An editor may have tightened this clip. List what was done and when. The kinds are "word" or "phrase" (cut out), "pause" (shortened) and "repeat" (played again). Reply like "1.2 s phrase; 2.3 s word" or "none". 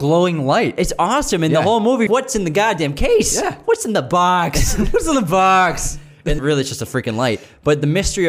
2.1 s word; 6.4 s word